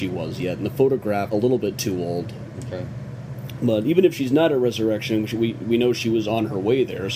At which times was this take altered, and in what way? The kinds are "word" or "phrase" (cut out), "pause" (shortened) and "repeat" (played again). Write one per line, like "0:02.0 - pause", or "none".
0:01.3 - phrase